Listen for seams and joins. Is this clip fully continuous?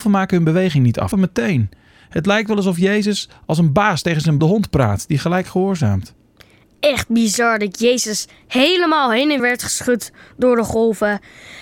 no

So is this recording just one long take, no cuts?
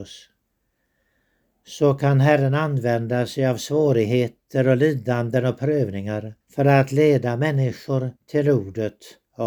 no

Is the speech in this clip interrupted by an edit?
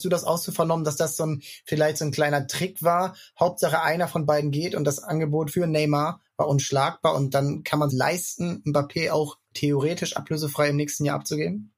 yes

